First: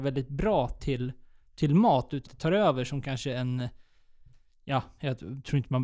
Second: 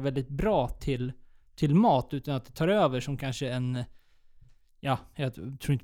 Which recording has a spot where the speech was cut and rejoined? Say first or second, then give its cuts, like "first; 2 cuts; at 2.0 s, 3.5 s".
first; 1 cut; at 2.3 s